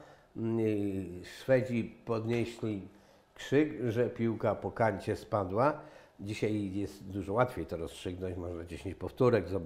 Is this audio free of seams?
yes; 0 cuts

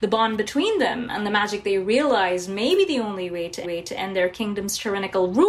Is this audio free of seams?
no; 1 cut; at 3.6 s

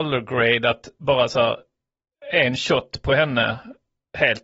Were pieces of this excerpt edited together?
no; 0 cuts

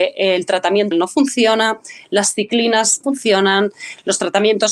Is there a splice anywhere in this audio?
yes; 2 cuts; at 0.9 s, 3.0 s

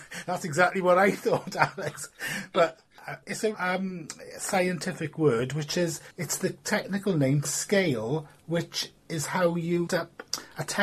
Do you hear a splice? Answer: yes; 5 cuts; at 3.2 s, 3.5 s, 6.1 s, 7.4 s, 9.9 s

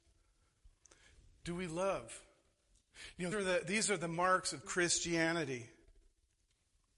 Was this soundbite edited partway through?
yes; 2 cuts; at 3.3 s, 4.6 s

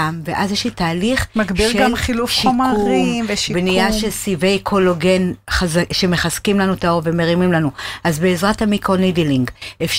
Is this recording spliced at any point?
no; 0 cuts

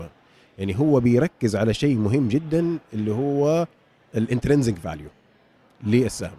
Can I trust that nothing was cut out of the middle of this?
yes; 0 cuts

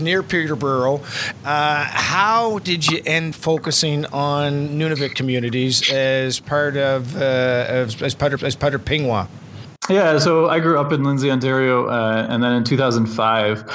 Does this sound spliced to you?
yes; 3 cuts; at 3.3 s, 8.4 s, 9.8 s

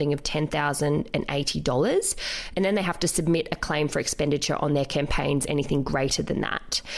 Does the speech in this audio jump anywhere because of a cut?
no; 0 cuts

